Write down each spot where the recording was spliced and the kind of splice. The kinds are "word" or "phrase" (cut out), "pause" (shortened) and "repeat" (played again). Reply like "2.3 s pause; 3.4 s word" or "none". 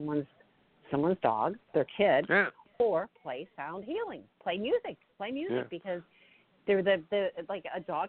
1.6 s pause; 5.1 s pause